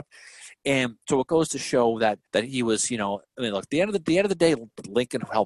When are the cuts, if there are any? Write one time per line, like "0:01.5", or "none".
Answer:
0:02.3